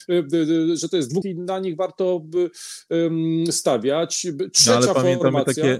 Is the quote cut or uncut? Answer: cut